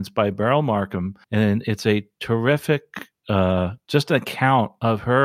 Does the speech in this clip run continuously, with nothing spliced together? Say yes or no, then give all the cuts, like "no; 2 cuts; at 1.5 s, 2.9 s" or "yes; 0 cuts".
no; 1 cut; at 1.2 s